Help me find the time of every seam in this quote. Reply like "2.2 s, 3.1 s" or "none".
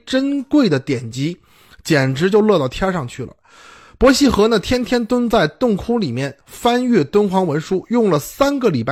none